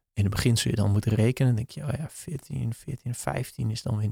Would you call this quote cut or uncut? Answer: uncut